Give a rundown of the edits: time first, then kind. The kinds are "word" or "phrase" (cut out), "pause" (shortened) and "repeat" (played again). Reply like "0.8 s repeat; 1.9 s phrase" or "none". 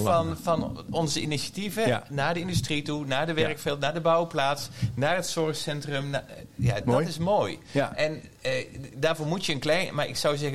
6.8 s word